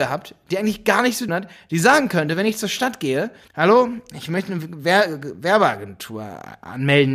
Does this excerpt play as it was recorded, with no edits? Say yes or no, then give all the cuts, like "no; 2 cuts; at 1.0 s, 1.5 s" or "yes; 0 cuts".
no; 2 cuts; at 1.3 s, 3.5 s